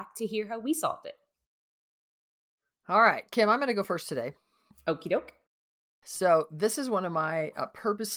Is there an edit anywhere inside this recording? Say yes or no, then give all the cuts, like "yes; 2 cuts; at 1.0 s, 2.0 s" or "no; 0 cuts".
no; 0 cuts